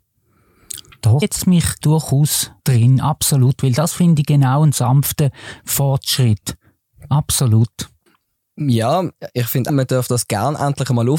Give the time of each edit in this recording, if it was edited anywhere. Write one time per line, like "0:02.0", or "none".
0:01.2
0:01.8
0:02.6
0:08.1
0:09.7